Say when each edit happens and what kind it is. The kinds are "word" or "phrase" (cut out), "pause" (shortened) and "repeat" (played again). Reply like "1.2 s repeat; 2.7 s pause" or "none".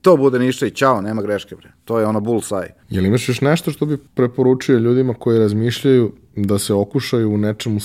2.8 s pause; 4.1 s pause